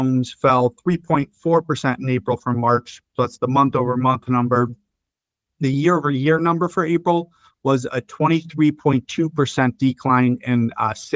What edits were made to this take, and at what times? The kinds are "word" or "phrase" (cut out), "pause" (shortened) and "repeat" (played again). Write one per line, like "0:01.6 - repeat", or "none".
none